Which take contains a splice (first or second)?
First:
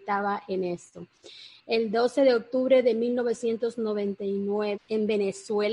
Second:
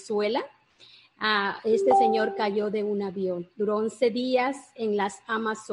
first